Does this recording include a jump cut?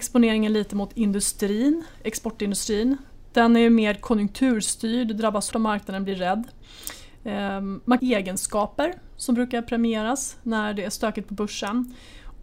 yes; 2 cuts; at 5.5 s, 8.0 s

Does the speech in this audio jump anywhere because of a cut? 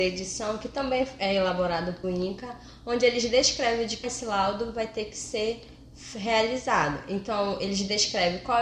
yes; 2 cuts; at 2.0 s, 4.0 s

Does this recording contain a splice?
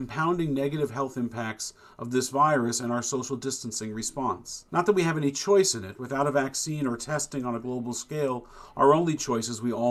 yes; 1 cut; at 4.7 s

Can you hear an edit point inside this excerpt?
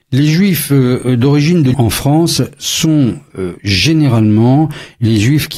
yes; 1 cut; at 1.7 s

